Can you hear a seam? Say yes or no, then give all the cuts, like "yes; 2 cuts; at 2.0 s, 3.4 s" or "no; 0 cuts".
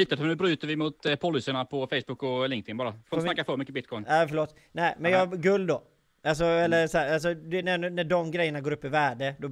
no; 0 cuts